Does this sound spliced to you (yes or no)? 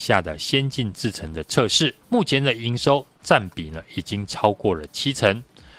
yes